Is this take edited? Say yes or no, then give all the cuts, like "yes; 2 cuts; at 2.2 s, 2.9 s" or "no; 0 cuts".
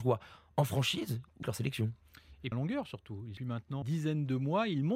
yes; 4 cuts; at 1.4 s, 2.5 s, 3.4 s, 3.8 s